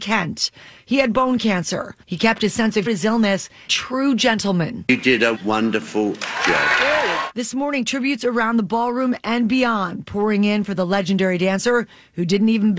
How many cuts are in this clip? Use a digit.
4